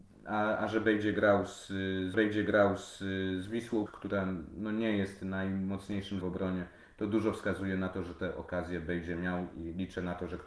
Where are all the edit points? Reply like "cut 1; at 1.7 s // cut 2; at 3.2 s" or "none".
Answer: cut 1; at 2.1 s // cut 2; at 3.9 s // cut 3; at 6.2 s